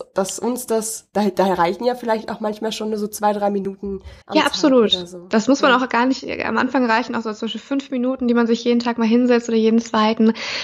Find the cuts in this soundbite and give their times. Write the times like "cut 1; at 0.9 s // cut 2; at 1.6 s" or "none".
cut 1; at 4.2 s